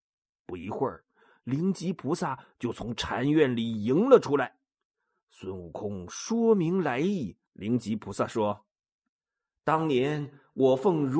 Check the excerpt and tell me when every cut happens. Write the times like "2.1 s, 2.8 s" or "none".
7.4 s